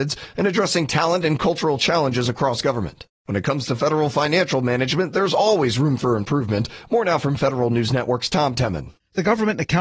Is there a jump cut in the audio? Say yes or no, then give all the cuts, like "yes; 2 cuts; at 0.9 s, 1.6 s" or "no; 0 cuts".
yes; 1 cut; at 3.1 s